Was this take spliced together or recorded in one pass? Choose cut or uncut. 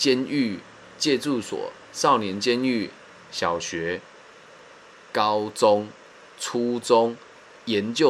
uncut